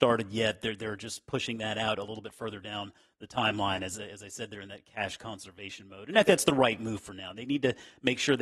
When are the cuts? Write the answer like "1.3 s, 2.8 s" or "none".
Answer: 4.0 s, 6.3 s

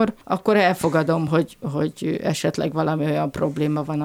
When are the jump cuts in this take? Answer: none

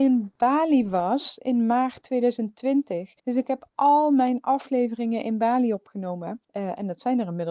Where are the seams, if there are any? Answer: 3.2 s, 6.4 s

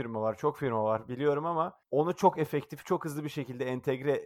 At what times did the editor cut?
1.8 s

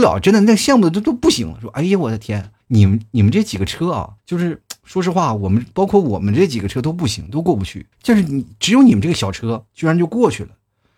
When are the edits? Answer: 2.6 s, 4.2 s, 5.7 s, 7.9 s, 9.7 s

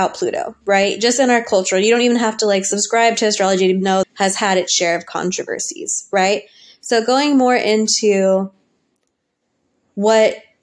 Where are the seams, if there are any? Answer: 4.0 s

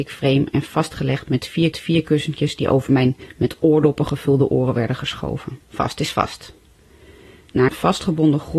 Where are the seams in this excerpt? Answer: 1.7 s, 5.6 s, 7.7 s

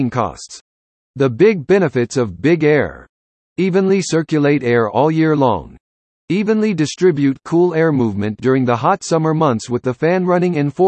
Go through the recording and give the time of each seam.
none

